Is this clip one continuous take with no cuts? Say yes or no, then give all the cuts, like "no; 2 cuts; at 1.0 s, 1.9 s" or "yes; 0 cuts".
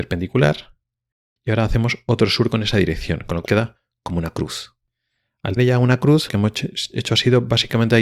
no; 3 cuts; at 3.5 s, 5.6 s, 6.3 s